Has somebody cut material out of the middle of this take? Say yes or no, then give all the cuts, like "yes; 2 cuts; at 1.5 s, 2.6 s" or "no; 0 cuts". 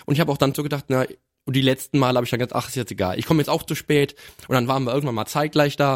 no; 0 cuts